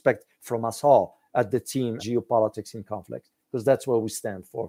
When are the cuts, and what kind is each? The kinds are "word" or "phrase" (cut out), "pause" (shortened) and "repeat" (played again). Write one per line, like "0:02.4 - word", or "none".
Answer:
0:02.0 - word